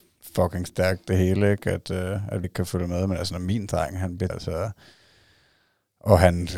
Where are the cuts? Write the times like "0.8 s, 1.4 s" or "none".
2.4 s, 4.3 s